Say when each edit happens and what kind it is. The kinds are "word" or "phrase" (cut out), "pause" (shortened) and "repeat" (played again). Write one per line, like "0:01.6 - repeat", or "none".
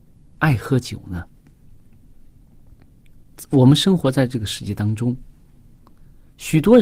none